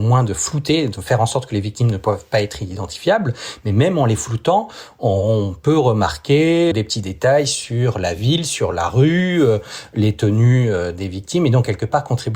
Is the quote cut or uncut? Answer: cut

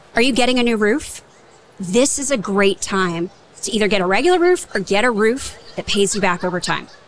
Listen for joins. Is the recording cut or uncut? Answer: uncut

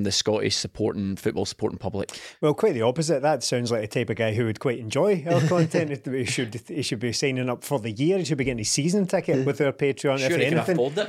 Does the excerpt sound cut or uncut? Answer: uncut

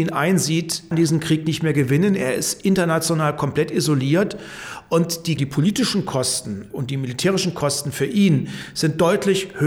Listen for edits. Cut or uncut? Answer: cut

